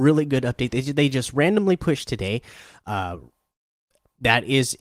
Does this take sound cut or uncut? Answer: uncut